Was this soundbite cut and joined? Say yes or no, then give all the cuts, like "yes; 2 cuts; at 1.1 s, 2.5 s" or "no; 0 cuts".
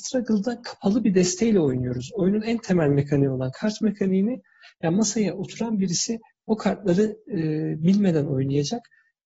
no; 0 cuts